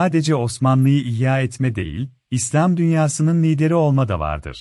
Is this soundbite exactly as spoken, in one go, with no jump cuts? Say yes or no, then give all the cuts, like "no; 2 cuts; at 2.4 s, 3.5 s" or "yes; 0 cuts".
yes; 0 cuts